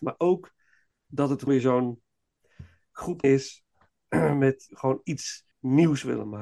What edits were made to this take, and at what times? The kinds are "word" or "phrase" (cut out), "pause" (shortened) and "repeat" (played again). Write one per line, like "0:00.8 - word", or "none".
0:01.5 - word
0:03.2 - word
0:04.7 - word
0:05.5 - pause